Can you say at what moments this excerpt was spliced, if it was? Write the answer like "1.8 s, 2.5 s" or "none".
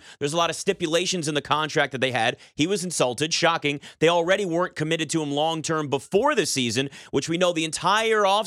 none